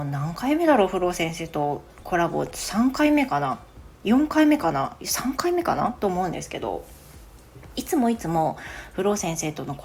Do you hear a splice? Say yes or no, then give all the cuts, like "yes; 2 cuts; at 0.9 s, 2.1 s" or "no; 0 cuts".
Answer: yes; 1 cut; at 4.0 s